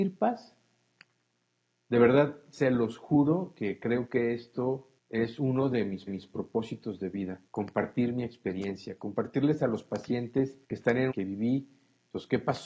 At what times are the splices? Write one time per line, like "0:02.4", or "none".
0:05.0
0:06.1
0:07.5
0:10.6
0:11.1